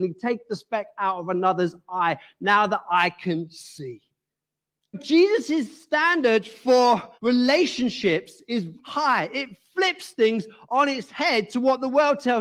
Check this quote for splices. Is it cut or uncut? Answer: cut